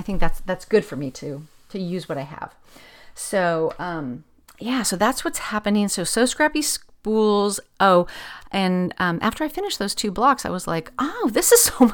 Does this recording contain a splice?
no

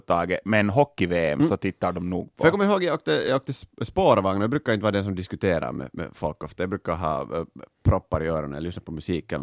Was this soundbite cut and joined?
no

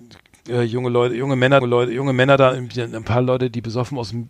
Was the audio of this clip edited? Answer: yes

